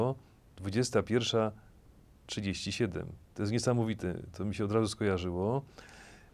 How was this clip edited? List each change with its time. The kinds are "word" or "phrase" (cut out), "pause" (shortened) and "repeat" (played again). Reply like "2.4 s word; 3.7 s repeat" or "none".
3.2 s pause